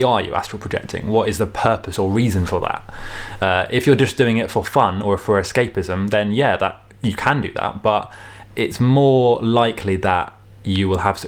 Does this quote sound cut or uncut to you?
uncut